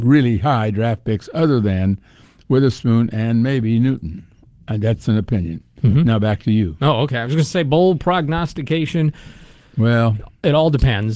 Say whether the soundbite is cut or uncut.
uncut